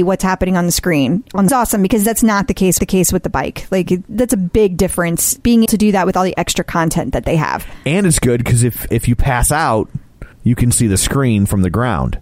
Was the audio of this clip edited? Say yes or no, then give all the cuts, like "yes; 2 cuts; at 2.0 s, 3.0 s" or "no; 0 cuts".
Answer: yes; 6 cuts; at 1.5 s, 2.8 s, 5.7 s, 8.9 s, 10.3 s, 10.7 s